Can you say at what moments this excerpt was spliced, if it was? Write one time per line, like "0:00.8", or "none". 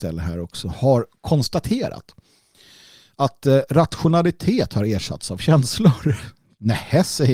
none